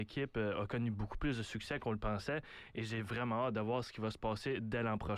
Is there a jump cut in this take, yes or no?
no